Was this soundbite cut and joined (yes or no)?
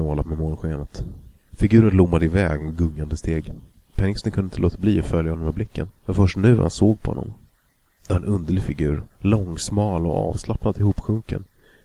yes